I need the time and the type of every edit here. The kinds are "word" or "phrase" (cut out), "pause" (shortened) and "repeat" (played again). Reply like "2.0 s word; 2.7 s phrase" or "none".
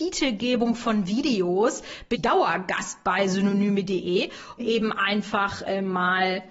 2.1 s word; 4.6 s word